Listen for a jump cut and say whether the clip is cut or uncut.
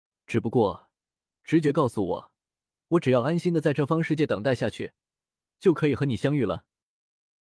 uncut